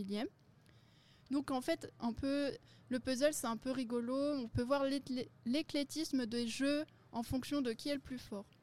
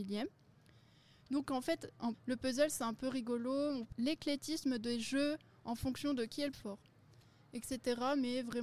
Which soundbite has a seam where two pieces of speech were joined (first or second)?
second